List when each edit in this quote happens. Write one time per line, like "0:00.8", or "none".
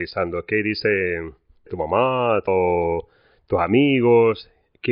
0:01.7
0:02.5

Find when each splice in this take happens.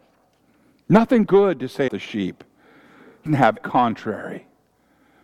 0:01.3
0:01.9
0:03.3
0:03.6

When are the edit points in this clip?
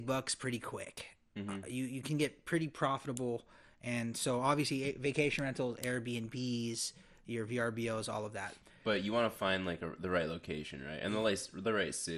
none

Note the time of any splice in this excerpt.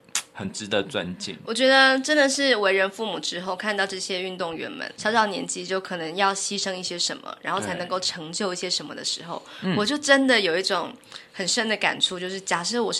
0:05.0

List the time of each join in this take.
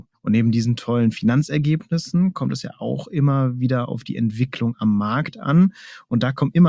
none

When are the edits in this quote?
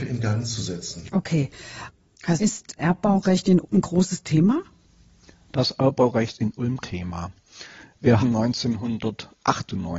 0:02.4
0:02.8
0:03.6
0:06.4
0:06.8
0:08.2

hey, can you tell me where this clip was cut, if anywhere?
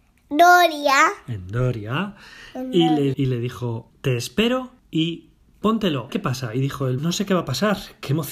0:03.1
0:03.9
0:04.8
0:06.1
0:07.0

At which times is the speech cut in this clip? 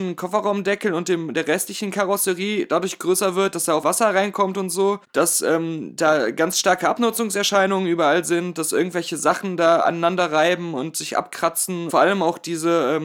0:03.8
0:05.0
0:11.9

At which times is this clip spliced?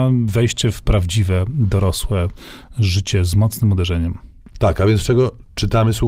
none

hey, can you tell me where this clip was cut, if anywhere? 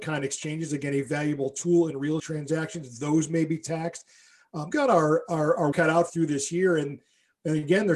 0:01.0
0:02.2
0:04.7
0:05.7
0:06.1

